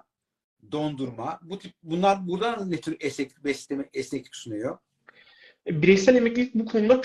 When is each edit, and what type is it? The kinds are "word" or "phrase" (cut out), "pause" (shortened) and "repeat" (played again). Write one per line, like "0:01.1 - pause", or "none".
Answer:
none